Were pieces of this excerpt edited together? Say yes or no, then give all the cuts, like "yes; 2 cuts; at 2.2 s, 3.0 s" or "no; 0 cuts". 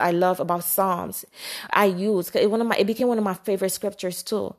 no; 0 cuts